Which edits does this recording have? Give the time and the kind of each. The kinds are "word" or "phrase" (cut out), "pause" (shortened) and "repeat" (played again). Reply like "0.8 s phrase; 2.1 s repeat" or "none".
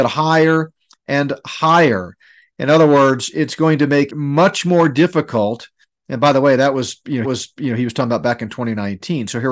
4.1 s word; 7.2 s repeat